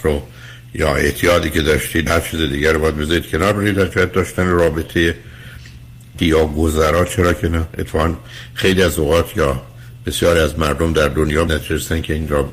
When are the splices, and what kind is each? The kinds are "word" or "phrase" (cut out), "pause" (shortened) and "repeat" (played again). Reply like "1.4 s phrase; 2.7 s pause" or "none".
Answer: 2.1 s word; 6.2 s word; 11.5 s word